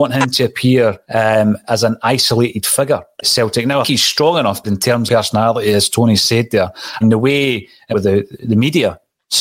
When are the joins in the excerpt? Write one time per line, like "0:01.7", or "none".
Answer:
0:01.0
0:03.2
0:03.8
0:04.6
0:05.1
0:07.0
0:07.9